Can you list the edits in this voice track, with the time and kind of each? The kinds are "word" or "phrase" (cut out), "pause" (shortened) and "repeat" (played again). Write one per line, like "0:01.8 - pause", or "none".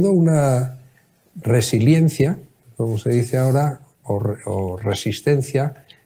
none